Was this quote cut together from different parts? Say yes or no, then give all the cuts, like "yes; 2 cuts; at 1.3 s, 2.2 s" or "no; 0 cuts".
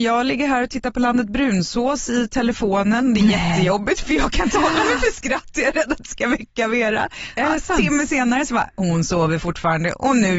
no; 0 cuts